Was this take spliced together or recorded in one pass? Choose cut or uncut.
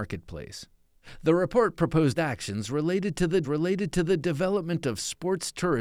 cut